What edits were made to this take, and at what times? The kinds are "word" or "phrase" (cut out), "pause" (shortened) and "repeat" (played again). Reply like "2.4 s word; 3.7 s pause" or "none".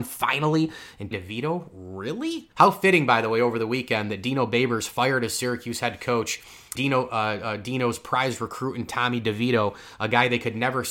1.1 s word; 2.5 s pause; 6.8 s word